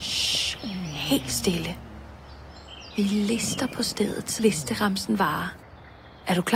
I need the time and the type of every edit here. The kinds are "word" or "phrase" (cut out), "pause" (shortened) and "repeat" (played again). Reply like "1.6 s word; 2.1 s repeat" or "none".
4.4 s word